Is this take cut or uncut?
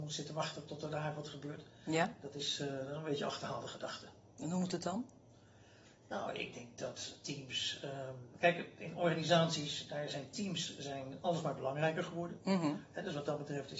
uncut